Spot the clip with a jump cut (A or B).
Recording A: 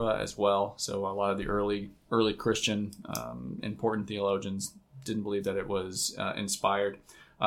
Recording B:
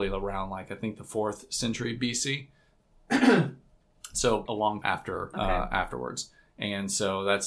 B